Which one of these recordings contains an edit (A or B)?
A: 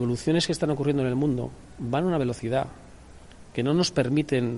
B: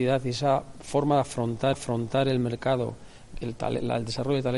B